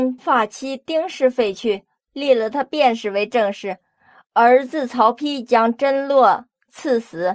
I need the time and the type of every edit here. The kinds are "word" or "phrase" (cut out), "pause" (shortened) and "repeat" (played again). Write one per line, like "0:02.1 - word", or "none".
none